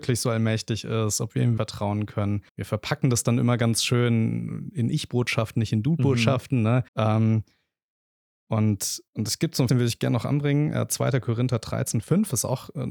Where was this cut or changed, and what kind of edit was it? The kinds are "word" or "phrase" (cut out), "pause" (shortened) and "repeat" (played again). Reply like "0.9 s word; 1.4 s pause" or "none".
1.6 s word; 2.5 s pause; 6.9 s pause; 9.1 s pause; 9.7 s word; 12.0 s word